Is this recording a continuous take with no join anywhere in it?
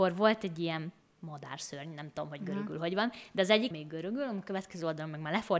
no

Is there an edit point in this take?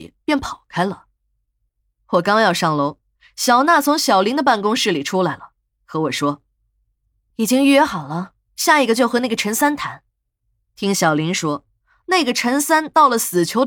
yes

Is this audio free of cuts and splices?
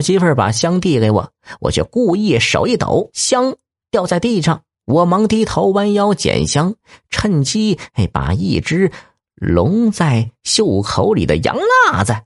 no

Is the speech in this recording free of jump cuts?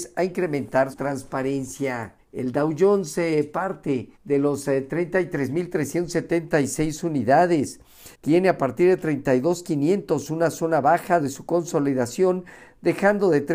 no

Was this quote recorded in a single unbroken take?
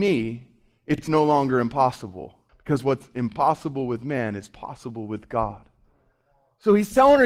no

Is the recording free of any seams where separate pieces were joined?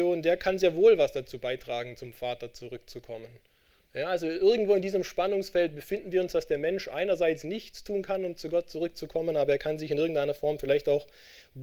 yes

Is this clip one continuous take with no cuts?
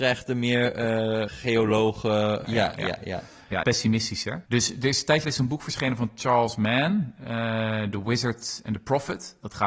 no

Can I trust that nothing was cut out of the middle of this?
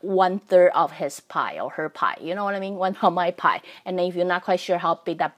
no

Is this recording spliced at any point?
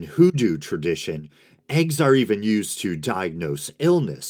no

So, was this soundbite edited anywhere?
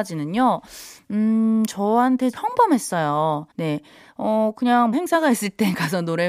yes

